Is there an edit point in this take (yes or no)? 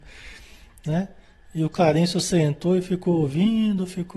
no